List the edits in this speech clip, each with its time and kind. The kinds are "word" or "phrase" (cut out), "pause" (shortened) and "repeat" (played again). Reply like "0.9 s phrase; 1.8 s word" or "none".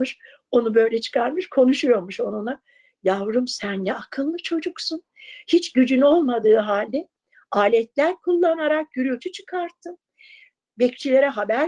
none